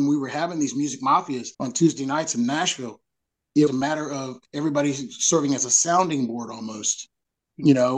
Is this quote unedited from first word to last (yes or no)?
no